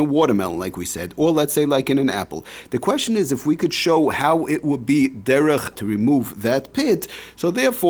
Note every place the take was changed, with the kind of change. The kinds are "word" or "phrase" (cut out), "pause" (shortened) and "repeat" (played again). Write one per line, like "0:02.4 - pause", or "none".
0:05.7 - word

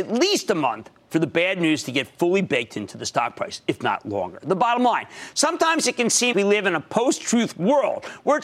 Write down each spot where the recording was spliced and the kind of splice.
0:06.3 - word

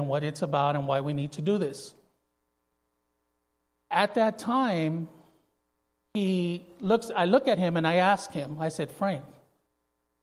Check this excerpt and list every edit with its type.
none

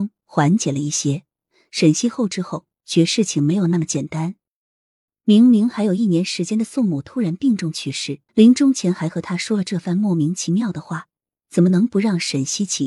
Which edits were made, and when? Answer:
0:08.3 - pause

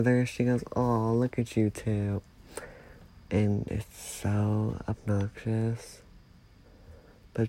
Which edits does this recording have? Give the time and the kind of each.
none

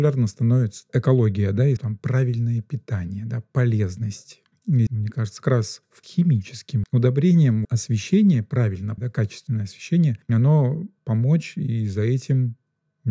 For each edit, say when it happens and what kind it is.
0:01.8 - word
0:04.9 - word
0:05.4 - word
0:06.0 - word
0:06.8 - word
0:07.6 - word
0:09.0 - word
0:11.0 - word

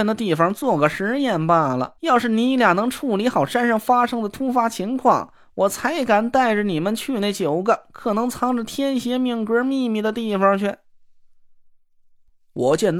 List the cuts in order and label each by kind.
0:02.0 - pause

